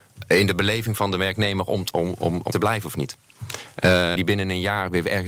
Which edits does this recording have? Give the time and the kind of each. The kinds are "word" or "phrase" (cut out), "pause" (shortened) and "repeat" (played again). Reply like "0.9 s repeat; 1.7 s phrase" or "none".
1.9 s word; 2.5 s word; 4.2 s word